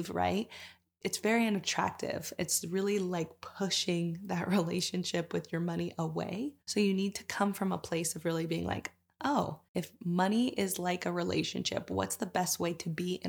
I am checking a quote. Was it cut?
yes; 2 cuts; at 6.6 s, 9.7 s

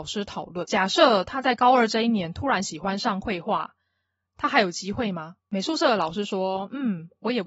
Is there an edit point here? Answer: yes; 1 cut; at 5.4 s

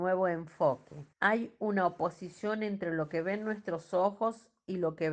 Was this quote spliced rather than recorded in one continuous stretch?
yes; 1 cut; at 1.1 s

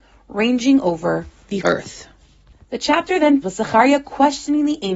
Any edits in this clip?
yes; 3 cuts; at 1.6 s, 2.5 s, 3.4 s

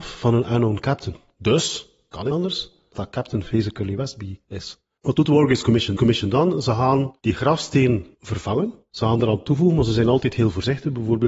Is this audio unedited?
no; 5 cuts; at 2.3 s, 2.9 s, 6.0 s, 8.1 s, 9.2 s

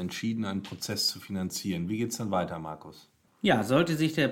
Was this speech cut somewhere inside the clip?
no; 0 cuts

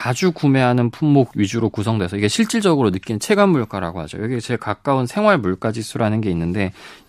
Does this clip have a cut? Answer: no; 0 cuts

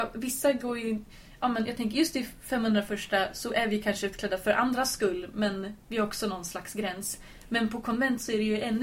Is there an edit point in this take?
no; 0 cuts

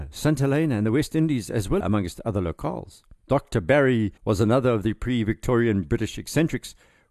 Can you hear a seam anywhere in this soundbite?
yes; 3 cuts; at 1.8 s, 3.2 s, 4.2 s

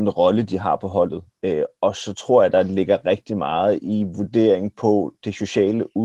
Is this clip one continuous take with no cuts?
yes; 0 cuts

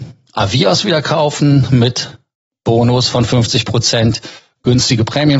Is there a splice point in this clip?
no; 0 cuts

